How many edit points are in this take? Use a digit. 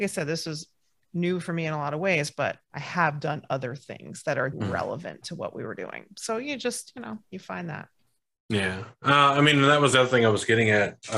3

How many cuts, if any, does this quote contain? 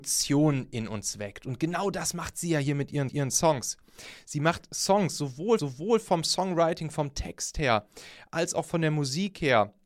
2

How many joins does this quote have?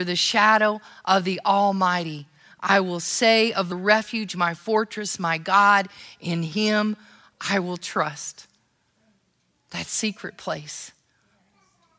1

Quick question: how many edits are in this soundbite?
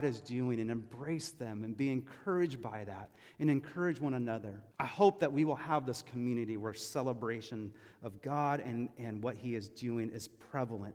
1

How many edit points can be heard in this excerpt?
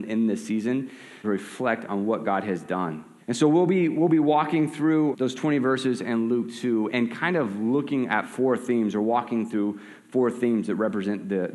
4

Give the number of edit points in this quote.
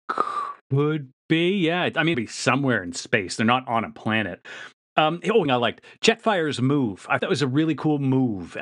3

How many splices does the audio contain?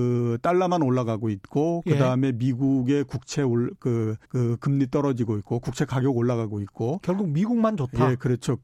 1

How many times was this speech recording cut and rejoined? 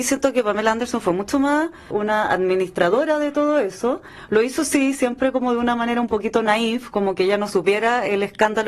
1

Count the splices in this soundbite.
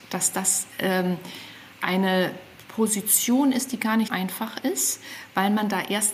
2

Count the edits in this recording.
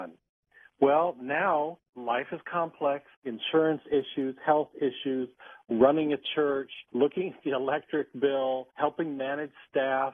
4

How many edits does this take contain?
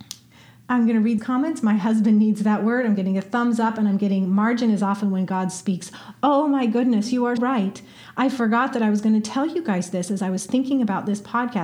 2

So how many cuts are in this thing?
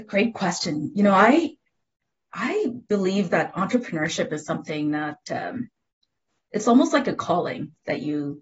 0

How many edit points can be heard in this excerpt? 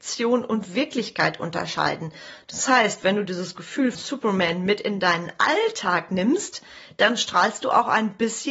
1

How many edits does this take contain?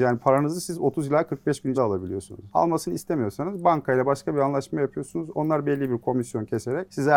1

